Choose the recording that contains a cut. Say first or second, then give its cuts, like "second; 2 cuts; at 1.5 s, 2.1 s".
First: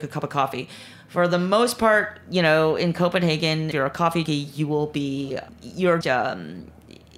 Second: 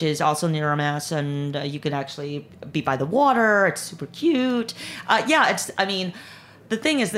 first; 4 cuts; at 3.7 s, 4.3 s, 5.5 s, 6.0 s